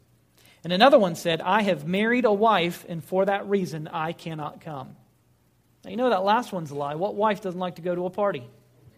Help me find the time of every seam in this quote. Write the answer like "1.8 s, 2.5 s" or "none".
none